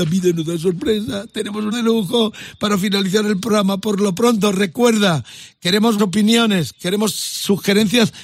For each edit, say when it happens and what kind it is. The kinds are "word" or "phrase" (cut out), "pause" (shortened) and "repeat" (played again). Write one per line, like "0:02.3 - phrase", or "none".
0:01.7 - word
0:06.0 - word